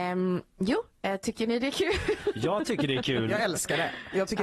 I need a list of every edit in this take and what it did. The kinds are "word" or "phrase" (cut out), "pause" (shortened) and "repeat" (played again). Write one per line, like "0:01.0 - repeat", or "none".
none